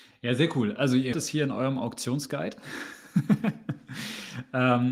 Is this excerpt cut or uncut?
cut